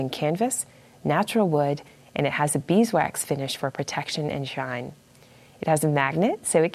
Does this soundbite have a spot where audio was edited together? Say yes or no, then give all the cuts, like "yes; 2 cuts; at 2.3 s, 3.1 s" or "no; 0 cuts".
no; 0 cuts